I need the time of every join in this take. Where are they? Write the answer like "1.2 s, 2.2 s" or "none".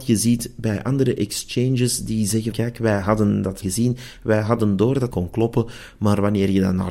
2.5 s, 3.6 s, 5.1 s